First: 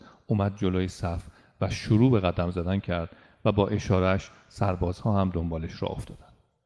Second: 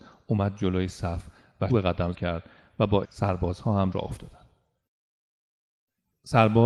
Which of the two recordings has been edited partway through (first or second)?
second